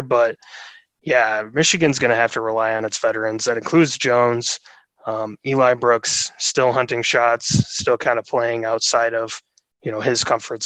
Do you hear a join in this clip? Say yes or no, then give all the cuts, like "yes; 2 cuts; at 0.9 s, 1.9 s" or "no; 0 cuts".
no; 0 cuts